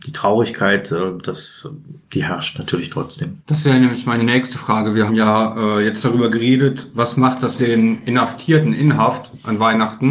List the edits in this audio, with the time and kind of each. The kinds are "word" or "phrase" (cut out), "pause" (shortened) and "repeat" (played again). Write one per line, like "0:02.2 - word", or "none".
0:02.0 - pause
0:03.4 - pause
0:05.1 - word
0:07.6 - word